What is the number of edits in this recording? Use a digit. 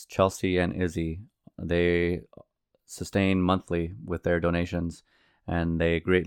0